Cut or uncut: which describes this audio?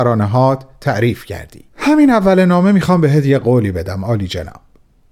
cut